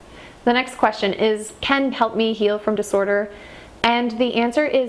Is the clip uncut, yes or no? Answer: no